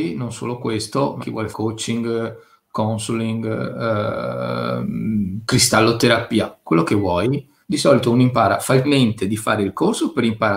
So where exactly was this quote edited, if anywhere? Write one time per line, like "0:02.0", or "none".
0:01.2
0:01.5
0:07.6
0:08.8